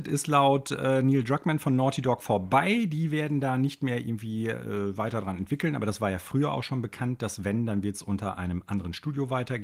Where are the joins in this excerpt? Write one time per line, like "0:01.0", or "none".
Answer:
none